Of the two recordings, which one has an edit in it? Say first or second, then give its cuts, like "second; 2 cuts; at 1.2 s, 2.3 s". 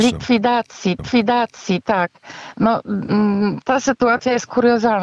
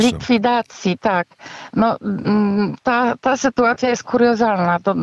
first; 2 cuts; at 1.0 s, 3.6 s